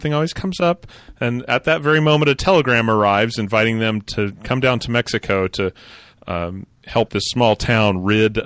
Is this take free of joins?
no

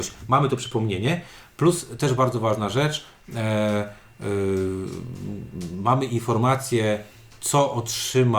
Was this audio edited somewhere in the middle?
no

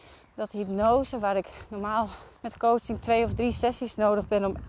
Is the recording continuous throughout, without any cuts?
no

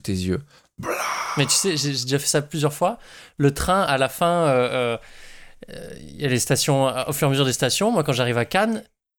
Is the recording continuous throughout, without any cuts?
yes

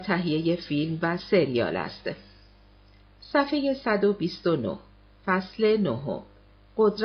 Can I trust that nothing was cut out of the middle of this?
yes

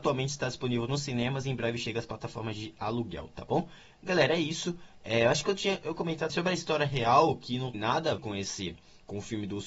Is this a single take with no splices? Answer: no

